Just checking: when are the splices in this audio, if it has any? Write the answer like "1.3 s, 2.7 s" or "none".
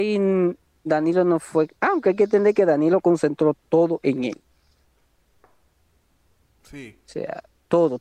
none